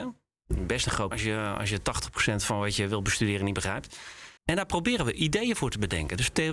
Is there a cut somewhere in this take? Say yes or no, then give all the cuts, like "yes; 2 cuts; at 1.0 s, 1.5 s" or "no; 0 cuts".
yes; 2 cuts; at 1.1 s, 4.4 s